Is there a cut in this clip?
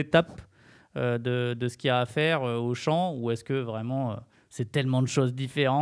yes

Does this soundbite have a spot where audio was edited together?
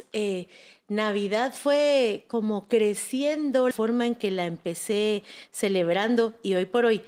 yes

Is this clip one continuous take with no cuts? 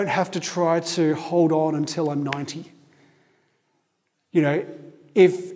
yes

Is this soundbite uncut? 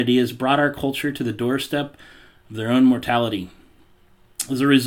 yes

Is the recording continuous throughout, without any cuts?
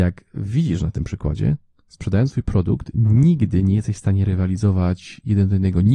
yes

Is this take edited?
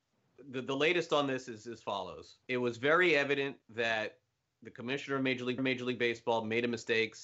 yes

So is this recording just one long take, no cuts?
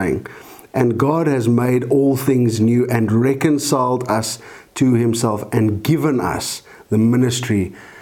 yes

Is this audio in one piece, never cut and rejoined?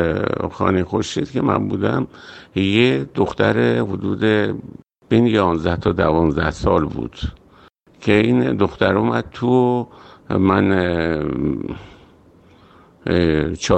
yes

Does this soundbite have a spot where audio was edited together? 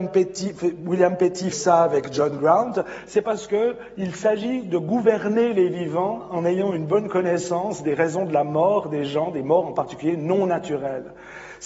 yes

